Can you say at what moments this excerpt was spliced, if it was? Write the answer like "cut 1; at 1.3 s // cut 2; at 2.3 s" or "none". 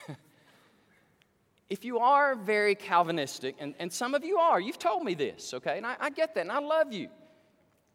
none